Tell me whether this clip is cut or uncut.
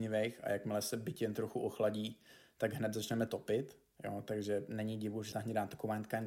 cut